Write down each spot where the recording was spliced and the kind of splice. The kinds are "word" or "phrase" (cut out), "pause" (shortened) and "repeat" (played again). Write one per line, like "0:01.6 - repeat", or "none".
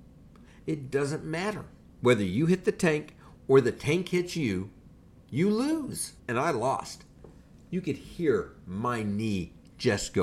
0:01.8 - pause
0:06.2 - pause